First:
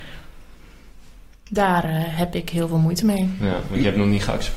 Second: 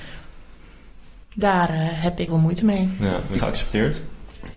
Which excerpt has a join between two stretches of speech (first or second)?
second